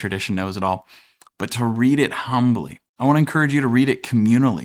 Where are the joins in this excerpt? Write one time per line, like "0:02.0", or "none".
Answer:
0:02.9